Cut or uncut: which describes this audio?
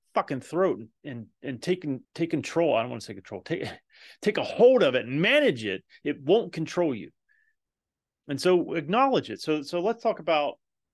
cut